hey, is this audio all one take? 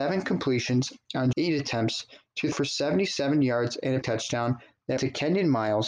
no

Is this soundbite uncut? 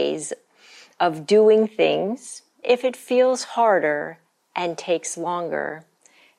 no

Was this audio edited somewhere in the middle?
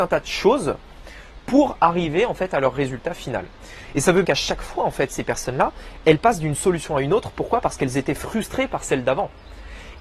yes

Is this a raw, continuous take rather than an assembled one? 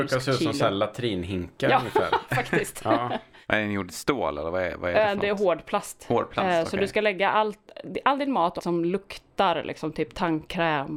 no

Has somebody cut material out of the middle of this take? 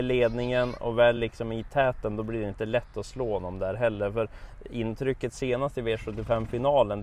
no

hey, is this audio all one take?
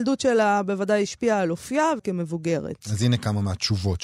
no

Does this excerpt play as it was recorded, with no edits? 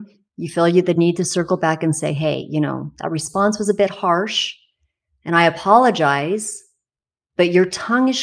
yes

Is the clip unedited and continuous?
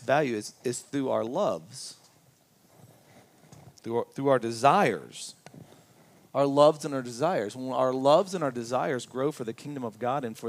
yes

